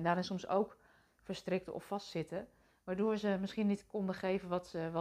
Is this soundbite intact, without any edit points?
yes; 0 cuts

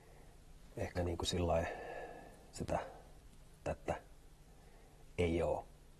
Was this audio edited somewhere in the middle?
yes; 3 cuts; at 0.9 s, 2.5 s, 3.6 s

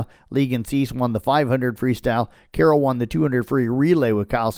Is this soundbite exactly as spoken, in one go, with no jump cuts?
yes; 0 cuts

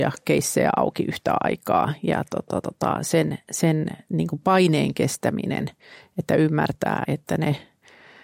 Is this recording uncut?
no; 1 cut; at 7.0 s

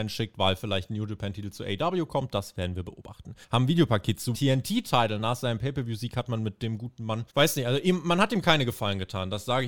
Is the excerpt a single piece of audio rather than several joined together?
no; 3 cuts; at 3.4 s, 4.3 s, 7.3 s

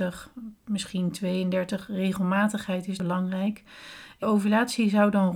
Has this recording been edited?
yes; 2 cuts; at 3.0 s, 4.2 s

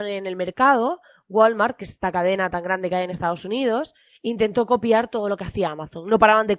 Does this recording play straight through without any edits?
yes; 0 cuts

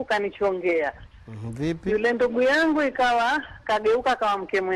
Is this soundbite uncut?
yes; 0 cuts

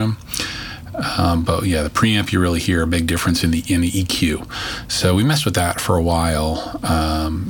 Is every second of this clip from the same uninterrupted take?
yes; 0 cuts

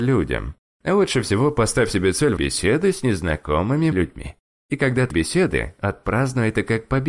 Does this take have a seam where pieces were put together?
yes; 3 cuts; at 2.4 s, 3.9 s, 5.1 s

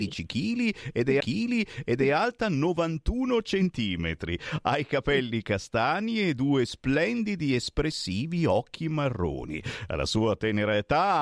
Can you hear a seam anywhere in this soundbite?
yes; 1 cut; at 1.2 s

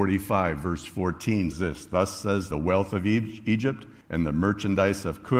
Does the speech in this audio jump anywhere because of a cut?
yes; 3 cuts; at 1.5 s, 2.5 s, 4.0 s

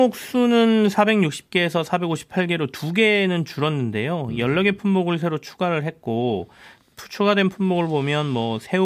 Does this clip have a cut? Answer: no; 0 cuts

